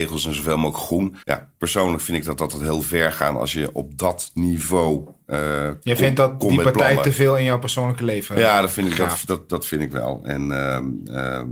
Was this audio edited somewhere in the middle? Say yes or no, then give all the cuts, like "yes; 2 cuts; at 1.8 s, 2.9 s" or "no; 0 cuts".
yes; 1 cut; at 1.2 s